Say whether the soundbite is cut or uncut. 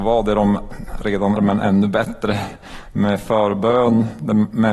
cut